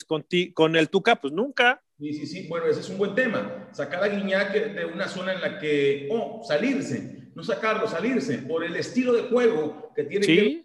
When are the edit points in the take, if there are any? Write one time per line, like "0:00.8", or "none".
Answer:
0:01.9